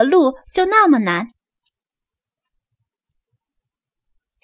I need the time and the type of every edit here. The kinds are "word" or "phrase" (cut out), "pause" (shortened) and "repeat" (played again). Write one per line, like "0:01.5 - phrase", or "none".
none